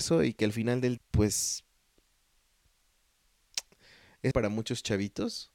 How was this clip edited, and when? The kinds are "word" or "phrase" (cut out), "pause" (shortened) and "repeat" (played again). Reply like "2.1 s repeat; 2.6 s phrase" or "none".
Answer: 1.0 s word; 4.3 s phrase